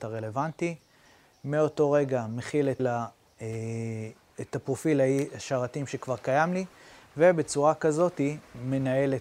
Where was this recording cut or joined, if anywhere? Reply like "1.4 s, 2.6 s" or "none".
2.8 s